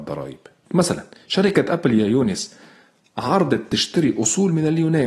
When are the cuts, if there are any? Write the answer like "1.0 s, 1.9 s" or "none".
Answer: none